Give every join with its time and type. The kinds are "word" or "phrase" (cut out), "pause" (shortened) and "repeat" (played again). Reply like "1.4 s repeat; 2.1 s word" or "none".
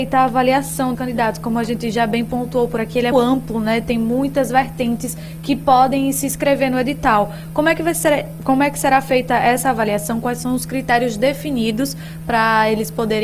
0.9 s word; 3.1 s word